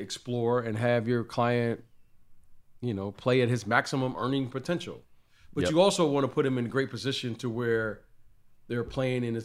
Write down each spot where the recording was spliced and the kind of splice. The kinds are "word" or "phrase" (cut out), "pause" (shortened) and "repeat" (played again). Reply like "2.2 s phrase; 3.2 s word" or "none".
none